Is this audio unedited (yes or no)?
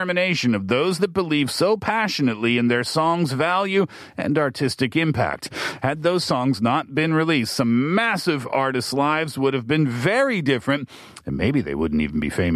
yes